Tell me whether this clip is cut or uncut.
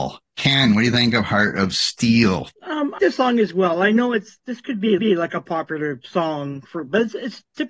cut